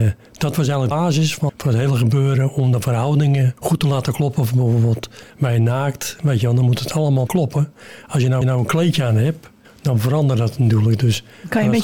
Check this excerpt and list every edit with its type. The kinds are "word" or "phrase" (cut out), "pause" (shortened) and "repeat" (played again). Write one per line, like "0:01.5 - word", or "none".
0:00.9 - word
0:01.5 - word
0:03.6 - pause
0:05.3 - pause
0:07.3 - word
0:08.4 - repeat
0:09.6 - pause